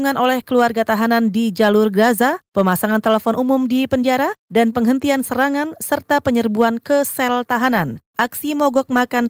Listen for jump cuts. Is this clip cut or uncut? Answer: uncut